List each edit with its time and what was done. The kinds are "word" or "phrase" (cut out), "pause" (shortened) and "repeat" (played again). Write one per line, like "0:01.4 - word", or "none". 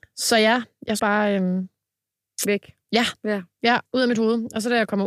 0:01.0 - word
0:03.9 - pause